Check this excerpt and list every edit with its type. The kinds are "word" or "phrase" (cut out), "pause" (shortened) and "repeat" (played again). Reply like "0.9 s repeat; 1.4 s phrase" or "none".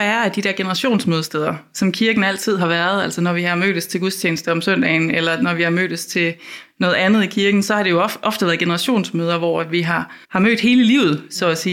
10.2 s pause